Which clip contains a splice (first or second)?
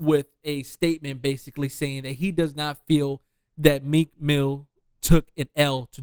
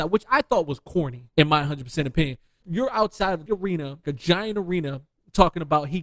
second